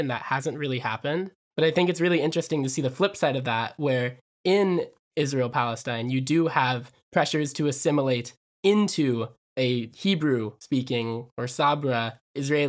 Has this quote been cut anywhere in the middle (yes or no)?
no